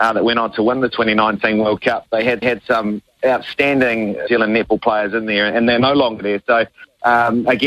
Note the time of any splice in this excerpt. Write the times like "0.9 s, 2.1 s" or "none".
2.4 s, 4.3 s